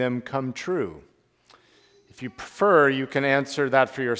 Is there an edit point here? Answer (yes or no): no